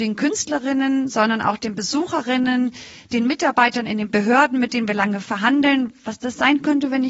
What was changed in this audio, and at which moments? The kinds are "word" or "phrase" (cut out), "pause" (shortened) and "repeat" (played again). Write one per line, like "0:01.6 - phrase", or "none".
none